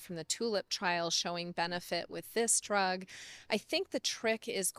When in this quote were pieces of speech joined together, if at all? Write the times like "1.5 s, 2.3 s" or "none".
none